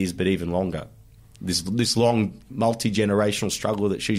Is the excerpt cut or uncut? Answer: uncut